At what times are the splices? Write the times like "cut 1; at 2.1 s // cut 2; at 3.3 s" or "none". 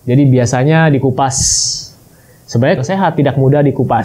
cut 1; at 2.8 s